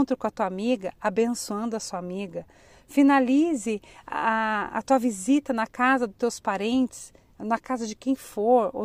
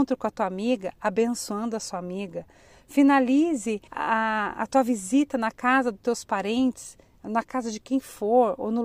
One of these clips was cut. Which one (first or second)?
second